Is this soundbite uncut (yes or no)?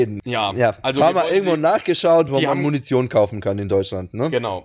yes